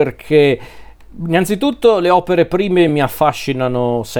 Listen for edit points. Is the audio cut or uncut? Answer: uncut